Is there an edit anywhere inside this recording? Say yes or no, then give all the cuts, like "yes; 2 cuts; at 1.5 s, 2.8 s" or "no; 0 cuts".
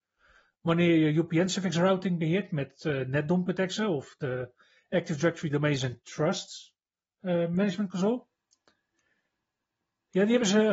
no; 0 cuts